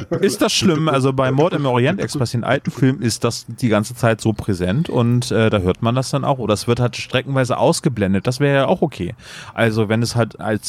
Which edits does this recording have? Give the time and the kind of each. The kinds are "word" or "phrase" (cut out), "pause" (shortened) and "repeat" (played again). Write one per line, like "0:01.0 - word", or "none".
none